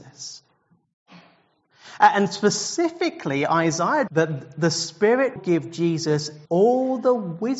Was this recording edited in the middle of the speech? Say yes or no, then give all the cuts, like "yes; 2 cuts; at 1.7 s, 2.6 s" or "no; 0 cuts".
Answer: yes; 3 cuts; at 4.1 s, 5.4 s, 6.5 s